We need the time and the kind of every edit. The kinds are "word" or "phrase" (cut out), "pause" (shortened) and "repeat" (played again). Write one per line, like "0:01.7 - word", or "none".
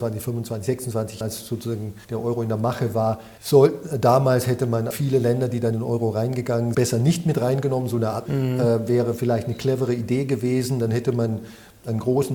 0:01.2 - word
0:02.0 - pause
0:03.4 - pause
0:04.9 - word
0:05.7 - word
0:06.7 - word
0:08.3 - word

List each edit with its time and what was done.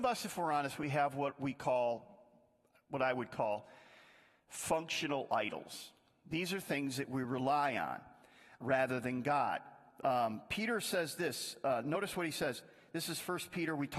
0:08.6 - word

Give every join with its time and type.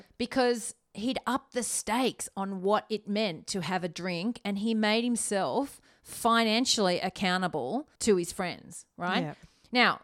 0:08.0 - pause

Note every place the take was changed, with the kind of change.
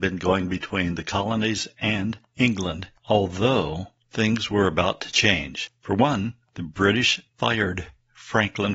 0:04.0 - pause
0:07.3 - pause

